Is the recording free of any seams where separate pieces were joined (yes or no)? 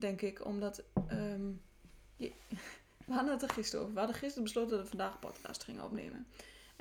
yes